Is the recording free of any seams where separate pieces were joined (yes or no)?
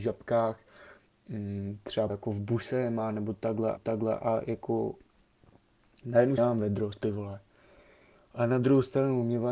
no